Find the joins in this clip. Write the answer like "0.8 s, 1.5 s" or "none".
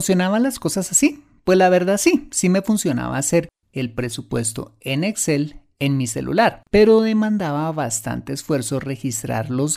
6.7 s